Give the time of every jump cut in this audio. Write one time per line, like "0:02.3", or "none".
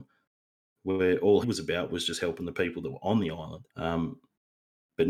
0:01.4
0:03.7